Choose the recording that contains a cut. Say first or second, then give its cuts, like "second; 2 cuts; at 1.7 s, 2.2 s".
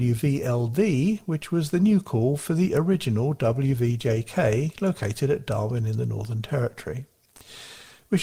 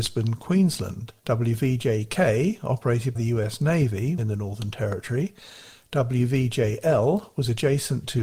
second; 3 cuts; at 1.2 s, 3.1 s, 4.2 s